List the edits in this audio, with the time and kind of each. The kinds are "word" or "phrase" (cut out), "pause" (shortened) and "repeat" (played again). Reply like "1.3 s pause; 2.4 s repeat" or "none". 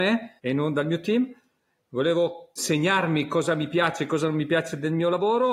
none